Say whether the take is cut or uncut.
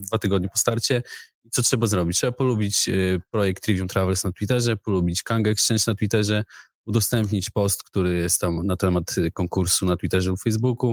uncut